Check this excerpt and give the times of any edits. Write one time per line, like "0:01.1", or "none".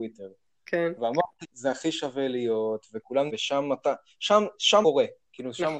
0:01.4
0:03.3
0:04.8